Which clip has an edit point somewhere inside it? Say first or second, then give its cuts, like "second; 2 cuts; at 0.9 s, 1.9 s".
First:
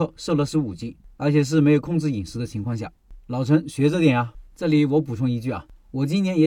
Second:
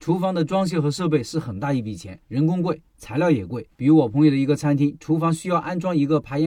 second; 2 cuts; at 2.2 s, 3.7 s